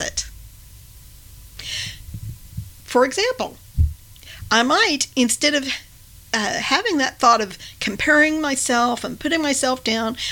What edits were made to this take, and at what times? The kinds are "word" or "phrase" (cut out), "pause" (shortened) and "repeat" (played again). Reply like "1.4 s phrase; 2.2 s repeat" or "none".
none